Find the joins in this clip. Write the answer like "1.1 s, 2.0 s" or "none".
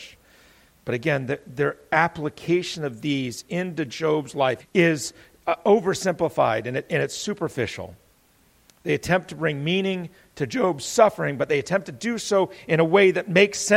4.6 s